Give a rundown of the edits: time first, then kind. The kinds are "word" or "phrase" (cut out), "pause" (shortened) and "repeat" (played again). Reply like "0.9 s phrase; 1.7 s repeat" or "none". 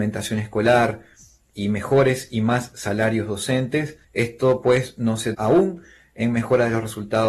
4.0 s pause; 5.3 s word